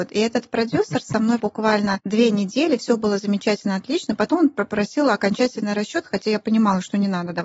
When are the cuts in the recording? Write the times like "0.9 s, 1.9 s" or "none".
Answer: 1.4 s